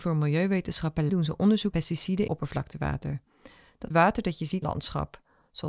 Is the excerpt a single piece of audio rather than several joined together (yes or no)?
no